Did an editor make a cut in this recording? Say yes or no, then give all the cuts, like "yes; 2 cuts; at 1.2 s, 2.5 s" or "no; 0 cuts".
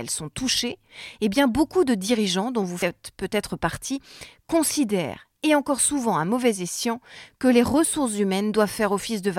no; 0 cuts